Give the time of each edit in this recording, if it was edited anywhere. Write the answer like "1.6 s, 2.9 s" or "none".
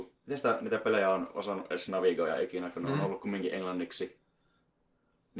none